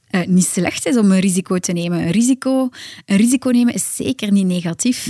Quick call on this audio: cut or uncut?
uncut